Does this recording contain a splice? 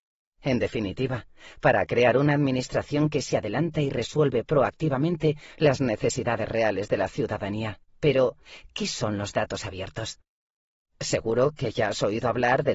yes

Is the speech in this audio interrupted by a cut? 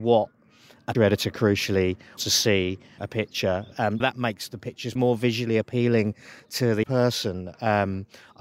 yes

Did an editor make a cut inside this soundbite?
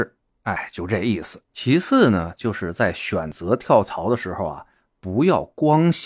yes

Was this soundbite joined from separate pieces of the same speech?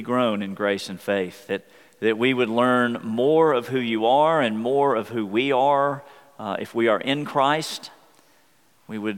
no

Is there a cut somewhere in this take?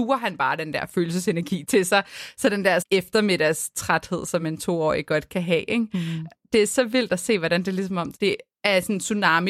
no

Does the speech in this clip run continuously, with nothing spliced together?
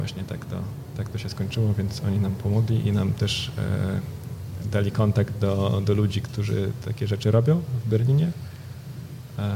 yes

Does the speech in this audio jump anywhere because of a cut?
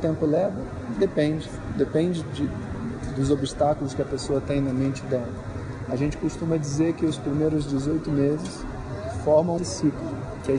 yes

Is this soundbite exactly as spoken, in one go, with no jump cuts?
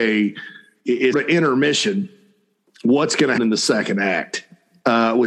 no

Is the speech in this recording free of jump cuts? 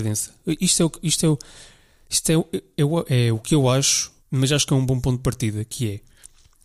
yes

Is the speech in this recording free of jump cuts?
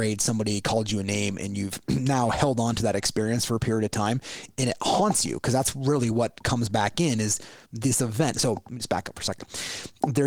yes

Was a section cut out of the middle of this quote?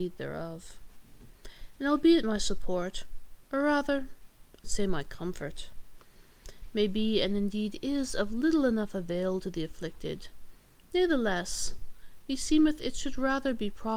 yes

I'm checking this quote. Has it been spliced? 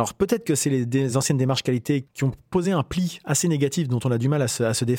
no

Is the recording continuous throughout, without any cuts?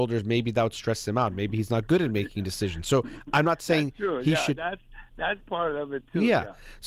yes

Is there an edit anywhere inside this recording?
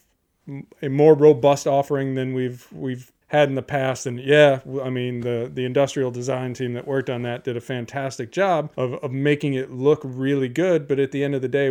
yes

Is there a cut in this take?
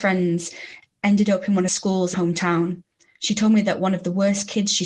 yes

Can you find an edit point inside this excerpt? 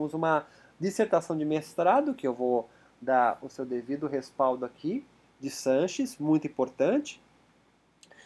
yes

